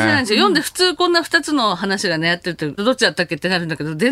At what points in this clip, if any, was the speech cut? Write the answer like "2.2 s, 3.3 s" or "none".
2.8 s